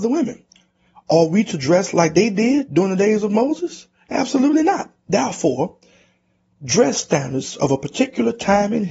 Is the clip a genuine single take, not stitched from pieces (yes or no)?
yes